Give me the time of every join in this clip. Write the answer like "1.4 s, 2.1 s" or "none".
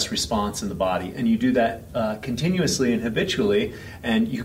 none